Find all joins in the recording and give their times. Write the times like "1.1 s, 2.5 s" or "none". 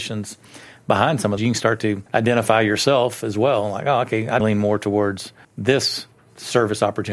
1.4 s, 2.1 s, 4.4 s, 5.4 s